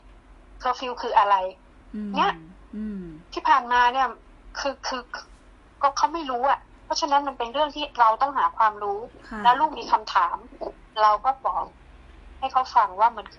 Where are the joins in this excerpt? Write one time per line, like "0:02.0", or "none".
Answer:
none

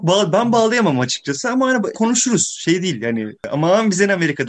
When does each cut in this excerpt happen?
0:01.9

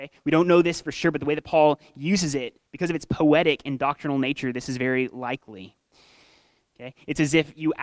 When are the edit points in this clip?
none

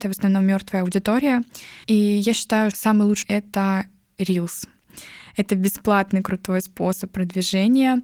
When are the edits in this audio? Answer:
0:01.8
0:02.7
0:03.2

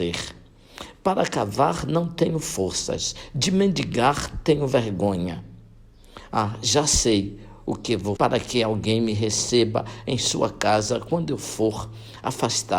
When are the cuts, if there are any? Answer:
0:08.2

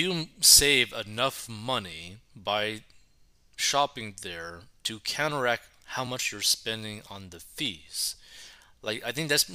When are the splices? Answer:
none

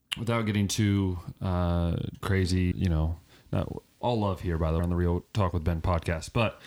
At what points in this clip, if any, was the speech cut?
0:02.2
0:02.7
0:04.0
0:04.8

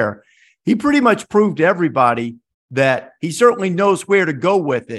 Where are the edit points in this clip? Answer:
none

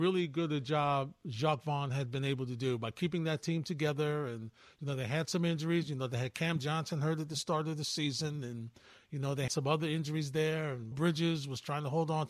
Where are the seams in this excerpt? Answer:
0:09.5
0:10.9

